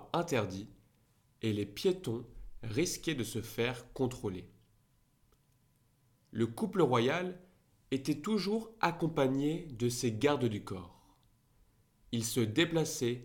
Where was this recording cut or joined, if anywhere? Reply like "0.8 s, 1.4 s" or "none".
none